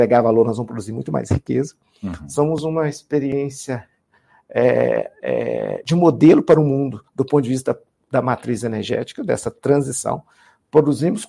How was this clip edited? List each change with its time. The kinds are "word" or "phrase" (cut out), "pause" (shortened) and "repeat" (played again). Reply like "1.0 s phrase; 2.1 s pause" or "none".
7.1 s pause